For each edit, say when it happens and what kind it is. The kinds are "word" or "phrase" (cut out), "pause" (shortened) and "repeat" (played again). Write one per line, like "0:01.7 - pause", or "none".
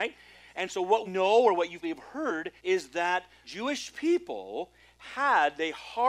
0:01.0 - word
0:01.8 - word
0:02.6 - pause
0:03.4 - word